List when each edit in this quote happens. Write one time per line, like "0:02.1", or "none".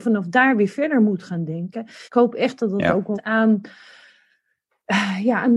0:02.0
0:03.1